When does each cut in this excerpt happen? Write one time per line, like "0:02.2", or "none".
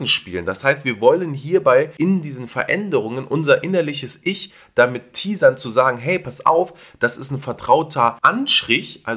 none

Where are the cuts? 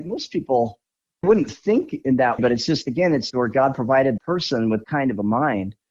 0:01.2
0:02.4
0:03.3
0:04.2
0:04.8

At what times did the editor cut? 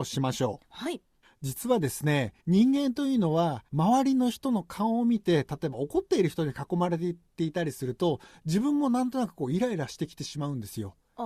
0:01.2
0:02.4
0:03.7

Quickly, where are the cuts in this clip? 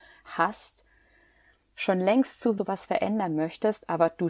0:02.6

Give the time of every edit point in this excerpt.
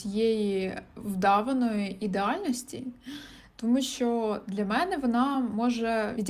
none

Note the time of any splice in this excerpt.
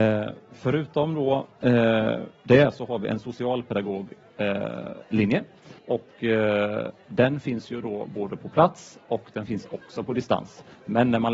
0:05.8

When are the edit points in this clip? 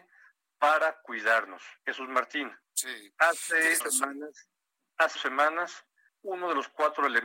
0:01.8
0:02.6
0:03.8
0:05.2
0:06.1

